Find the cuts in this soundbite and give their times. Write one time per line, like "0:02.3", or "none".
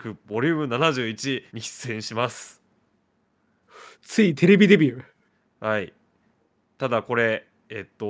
0:01.5
0:03.9